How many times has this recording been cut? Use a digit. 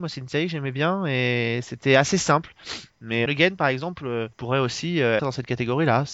3